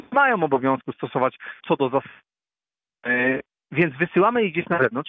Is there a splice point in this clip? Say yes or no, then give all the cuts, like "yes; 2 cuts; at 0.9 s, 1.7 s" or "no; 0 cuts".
yes; 1 cut; at 1.6 s